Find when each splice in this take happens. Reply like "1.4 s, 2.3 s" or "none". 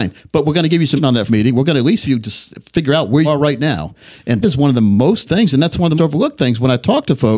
1.0 s, 1.3 s, 2.0 s, 3.2 s, 4.4 s, 5.3 s, 6.0 s